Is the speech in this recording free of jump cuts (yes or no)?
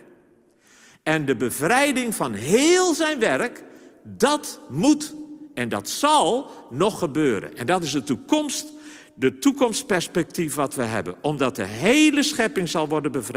yes